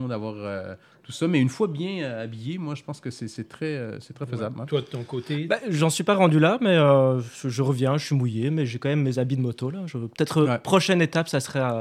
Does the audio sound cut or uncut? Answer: uncut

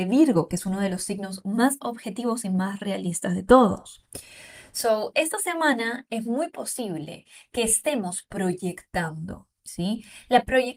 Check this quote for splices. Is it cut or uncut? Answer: cut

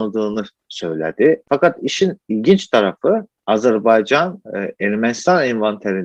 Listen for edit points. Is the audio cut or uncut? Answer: uncut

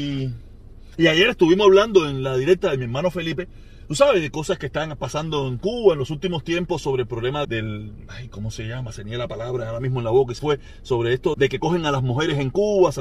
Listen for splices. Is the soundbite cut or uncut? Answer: cut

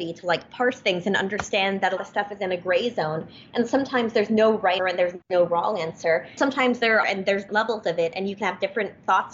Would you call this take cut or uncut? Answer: cut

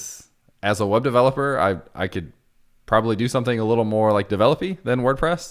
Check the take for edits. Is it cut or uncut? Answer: uncut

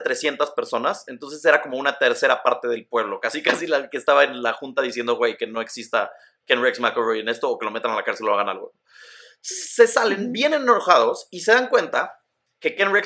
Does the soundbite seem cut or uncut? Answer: uncut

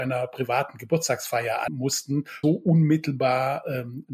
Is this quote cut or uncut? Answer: cut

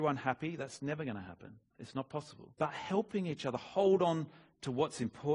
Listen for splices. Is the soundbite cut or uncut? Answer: cut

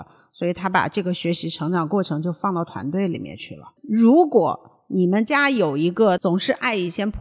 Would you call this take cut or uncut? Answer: cut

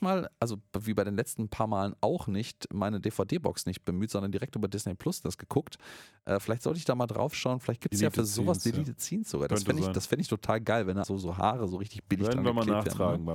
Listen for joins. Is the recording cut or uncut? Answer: cut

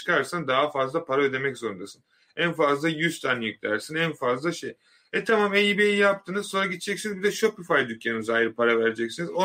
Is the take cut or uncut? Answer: uncut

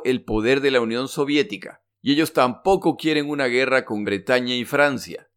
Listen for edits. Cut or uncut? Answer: cut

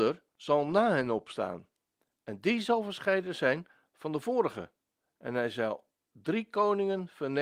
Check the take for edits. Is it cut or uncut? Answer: uncut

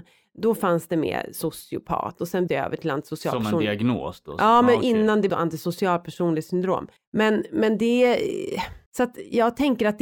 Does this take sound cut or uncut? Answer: cut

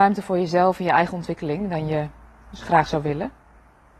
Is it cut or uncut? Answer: uncut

